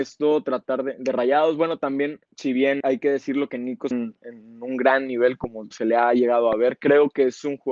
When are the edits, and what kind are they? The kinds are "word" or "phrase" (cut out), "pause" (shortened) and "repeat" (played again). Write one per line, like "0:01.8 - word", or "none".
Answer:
0:02.2 - pause
0:02.8 - word
0:03.9 - phrase
0:05.7 - word